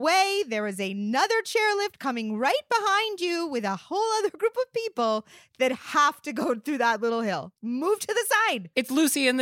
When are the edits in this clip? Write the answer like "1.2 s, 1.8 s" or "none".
none